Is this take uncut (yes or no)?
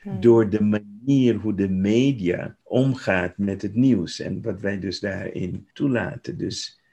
no